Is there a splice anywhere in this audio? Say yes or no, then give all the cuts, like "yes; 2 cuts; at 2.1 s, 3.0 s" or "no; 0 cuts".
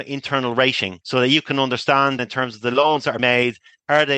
yes; 3 cuts; at 1.0 s, 2.2 s, 3.2 s